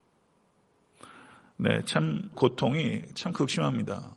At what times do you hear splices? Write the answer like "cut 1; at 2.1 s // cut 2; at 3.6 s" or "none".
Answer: cut 1; at 2.3 s